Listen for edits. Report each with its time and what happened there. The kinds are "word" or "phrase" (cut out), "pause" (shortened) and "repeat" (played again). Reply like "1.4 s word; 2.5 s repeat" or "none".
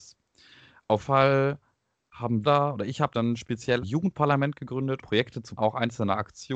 1.0 s word; 2.4 s word; 3.1 s word; 3.8 s word; 5.0 s word; 5.6 s word